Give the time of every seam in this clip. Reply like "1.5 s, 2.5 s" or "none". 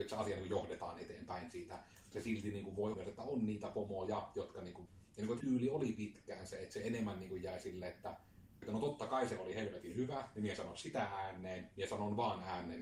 2.1 s, 2.9 s, 4.9 s, 5.4 s, 8.6 s